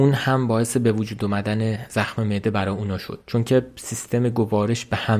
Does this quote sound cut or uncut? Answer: uncut